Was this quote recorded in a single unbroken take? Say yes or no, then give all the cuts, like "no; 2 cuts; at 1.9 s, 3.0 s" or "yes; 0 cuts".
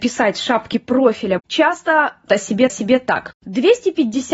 no; 3 cuts; at 1.4 s, 2.3 s, 2.7 s